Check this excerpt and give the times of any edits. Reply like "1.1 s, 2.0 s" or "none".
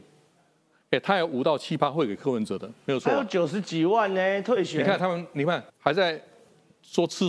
5.7 s